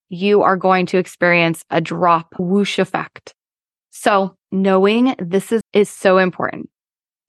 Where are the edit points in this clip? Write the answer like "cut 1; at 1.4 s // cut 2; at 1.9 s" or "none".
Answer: cut 1; at 2.4 s // cut 2; at 4.5 s // cut 3; at 5.6 s